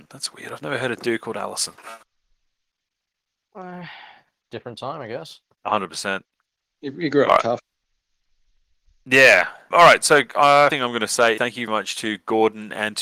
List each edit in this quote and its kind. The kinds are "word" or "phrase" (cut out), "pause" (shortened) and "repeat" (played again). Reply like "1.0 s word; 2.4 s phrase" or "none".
9.7 s word; 10.7 s word; 11.4 s word; 11.7 s word

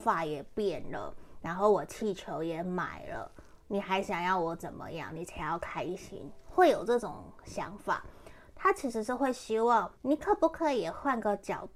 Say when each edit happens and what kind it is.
10.0 s pause

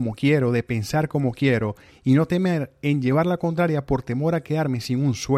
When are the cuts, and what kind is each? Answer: none

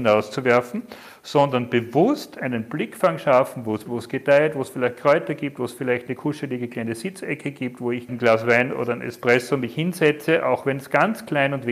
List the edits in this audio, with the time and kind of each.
3.9 s word; 8.1 s phrase

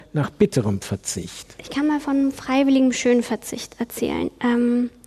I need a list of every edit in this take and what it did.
none

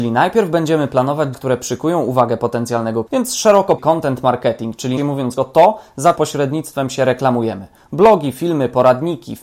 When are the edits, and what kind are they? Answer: 1.3 s word; 3.1 s word; 3.8 s word; 5.0 s word; 5.4 s word; 6.2 s word

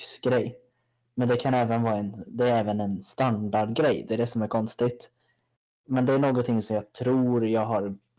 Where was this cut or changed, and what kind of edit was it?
none

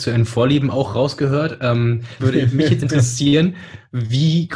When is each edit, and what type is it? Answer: 2.2 s word; 2.8 s word

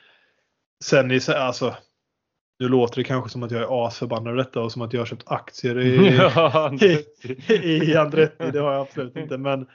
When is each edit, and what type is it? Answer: none

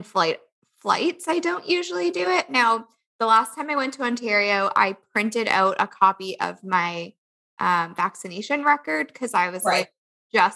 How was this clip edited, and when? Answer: none

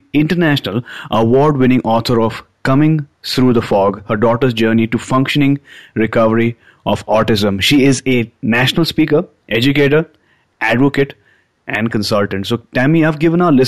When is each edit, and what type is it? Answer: 3.1 s pause

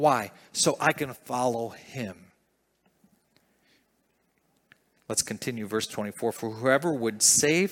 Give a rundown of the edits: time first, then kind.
none

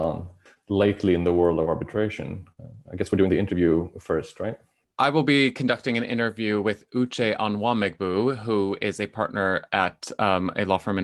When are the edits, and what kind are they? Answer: none

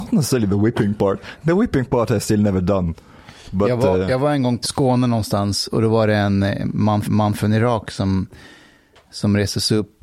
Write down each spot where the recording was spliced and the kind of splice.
4.6 s phrase; 7.0 s repeat

